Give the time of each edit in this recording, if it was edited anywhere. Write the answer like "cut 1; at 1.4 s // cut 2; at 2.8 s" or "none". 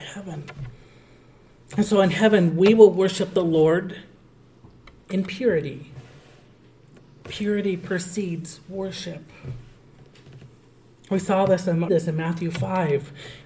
cut 1; at 11.9 s

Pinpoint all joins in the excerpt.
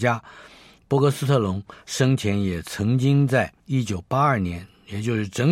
cut 1; at 3.6 s

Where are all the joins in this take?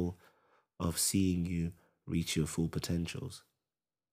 none

